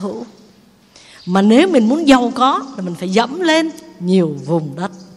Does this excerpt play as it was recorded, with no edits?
yes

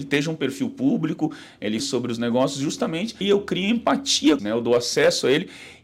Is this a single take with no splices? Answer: no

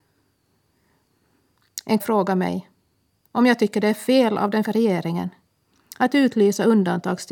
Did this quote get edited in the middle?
yes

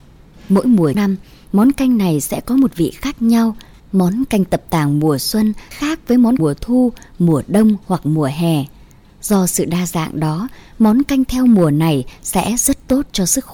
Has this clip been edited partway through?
yes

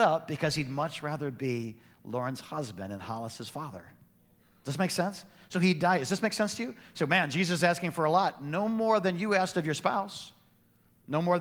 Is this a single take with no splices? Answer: yes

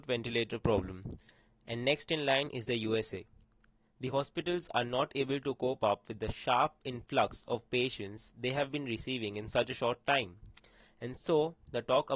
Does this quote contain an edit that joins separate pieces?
no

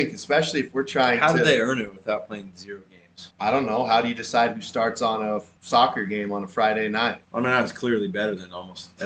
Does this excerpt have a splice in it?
yes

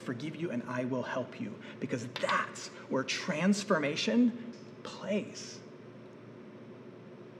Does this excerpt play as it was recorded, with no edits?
no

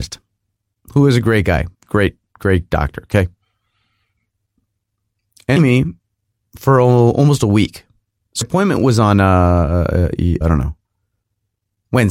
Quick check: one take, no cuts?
no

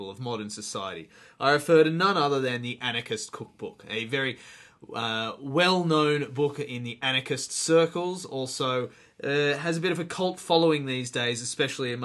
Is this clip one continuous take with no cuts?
yes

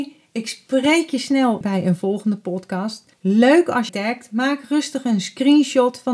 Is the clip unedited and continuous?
no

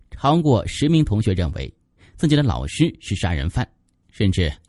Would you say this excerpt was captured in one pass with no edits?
yes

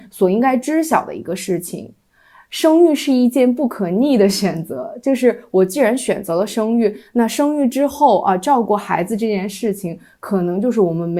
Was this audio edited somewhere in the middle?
no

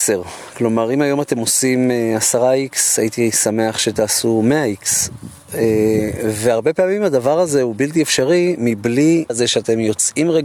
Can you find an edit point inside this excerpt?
yes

